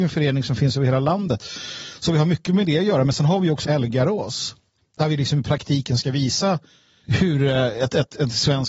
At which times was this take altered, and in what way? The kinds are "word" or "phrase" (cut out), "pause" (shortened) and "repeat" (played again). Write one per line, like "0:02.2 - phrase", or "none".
0:03.6 - word
0:07.0 - word